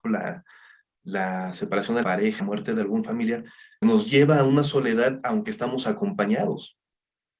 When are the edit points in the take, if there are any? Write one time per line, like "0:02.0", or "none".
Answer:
0:02.0
0:02.4
0:03.8